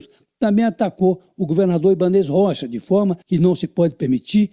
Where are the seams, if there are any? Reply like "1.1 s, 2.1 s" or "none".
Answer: 3.2 s